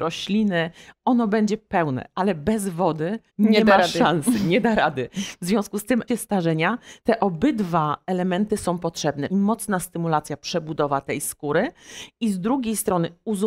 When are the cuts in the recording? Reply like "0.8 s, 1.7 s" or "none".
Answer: 3.3 s, 6.1 s, 7.0 s, 9.3 s